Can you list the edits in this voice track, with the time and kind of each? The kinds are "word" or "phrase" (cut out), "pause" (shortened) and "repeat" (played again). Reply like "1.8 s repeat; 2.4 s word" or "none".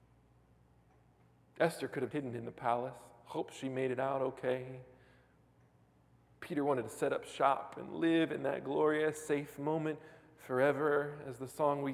2.1 s word